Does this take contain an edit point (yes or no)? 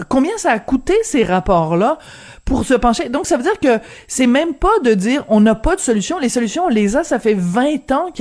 no